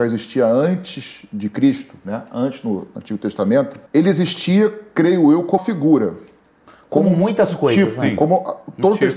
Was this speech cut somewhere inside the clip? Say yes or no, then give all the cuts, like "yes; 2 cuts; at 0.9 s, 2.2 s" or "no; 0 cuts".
yes; 2 cuts; at 3.9 s, 5.6 s